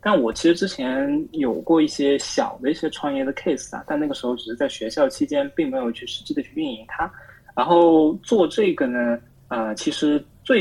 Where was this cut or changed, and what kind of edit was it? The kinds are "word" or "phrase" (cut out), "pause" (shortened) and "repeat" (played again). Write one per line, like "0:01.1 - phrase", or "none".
none